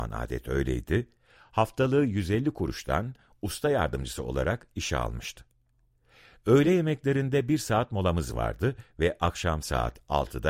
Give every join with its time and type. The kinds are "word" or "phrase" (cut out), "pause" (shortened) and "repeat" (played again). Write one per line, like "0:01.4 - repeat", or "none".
none